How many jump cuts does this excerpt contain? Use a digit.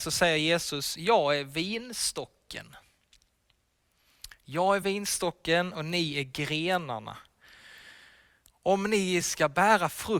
0